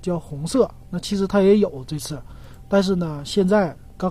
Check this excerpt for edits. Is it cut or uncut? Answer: uncut